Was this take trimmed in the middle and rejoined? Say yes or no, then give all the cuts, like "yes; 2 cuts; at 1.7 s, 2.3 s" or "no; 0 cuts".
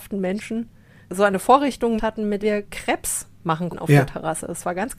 yes; 4 cuts; at 1.1 s, 2.0 s, 2.4 s, 3.7 s